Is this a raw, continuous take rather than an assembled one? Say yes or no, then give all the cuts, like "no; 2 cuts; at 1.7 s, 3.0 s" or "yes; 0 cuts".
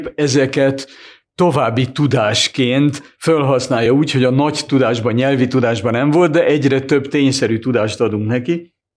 yes; 0 cuts